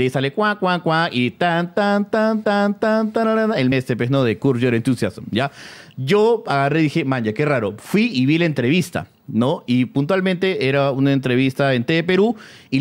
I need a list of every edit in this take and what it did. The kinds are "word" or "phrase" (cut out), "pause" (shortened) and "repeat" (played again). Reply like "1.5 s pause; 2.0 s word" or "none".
2.4 s repeat; 3.7 s word